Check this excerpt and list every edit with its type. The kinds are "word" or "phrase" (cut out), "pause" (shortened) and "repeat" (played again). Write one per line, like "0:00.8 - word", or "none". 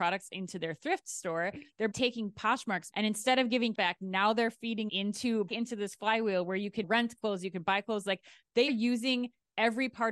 0:01.9 - word
0:02.9 - word
0:03.7 - word
0:04.9 - word
0:05.5 - word
0:06.8 - word
0:08.7 - word